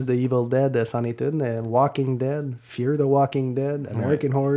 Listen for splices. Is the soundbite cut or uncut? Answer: uncut